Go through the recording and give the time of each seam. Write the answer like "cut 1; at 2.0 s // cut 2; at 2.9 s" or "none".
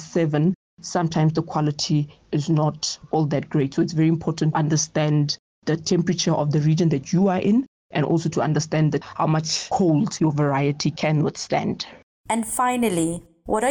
cut 1; at 4.5 s

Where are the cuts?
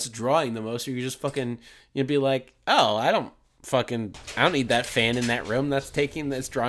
cut 1; at 1.8 s

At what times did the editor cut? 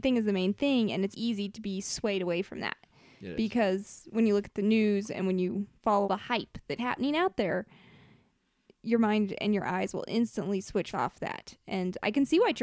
cut 1; at 1.1 s // cut 2; at 6.0 s // cut 3; at 6.8 s // cut 4; at 10.9 s

